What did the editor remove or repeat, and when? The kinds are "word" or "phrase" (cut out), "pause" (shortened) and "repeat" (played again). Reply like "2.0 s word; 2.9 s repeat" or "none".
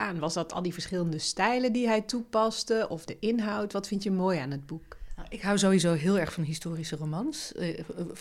3.1 s word